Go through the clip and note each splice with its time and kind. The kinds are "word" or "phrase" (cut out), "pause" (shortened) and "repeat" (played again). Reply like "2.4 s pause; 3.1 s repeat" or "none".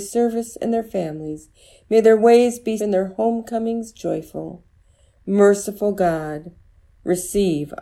2.8 s word